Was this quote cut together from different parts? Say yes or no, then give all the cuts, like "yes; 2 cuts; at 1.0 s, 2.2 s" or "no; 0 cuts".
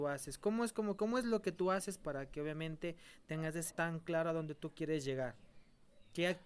yes; 2 cuts; at 1.0 s, 3.7 s